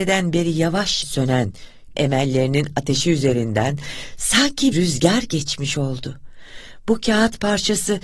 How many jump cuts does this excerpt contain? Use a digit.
3